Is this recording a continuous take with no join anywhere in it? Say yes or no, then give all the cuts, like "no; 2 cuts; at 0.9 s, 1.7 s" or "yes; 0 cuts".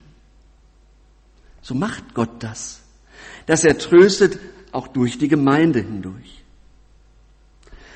yes; 0 cuts